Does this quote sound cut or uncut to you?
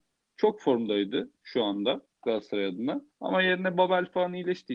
cut